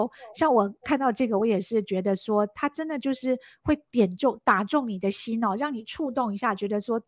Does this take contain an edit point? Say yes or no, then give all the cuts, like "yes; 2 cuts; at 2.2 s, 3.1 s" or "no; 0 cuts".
no; 0 cuts